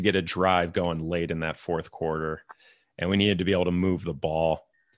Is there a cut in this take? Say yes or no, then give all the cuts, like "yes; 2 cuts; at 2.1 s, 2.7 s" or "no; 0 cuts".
no; 0 cuts